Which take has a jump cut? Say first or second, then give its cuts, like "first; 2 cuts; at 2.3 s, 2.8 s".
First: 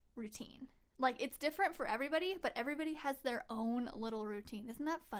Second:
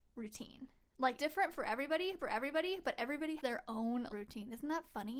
second; 4 cuts; at 1.2 s, 2.2 s, 3.4 s, 4.1 s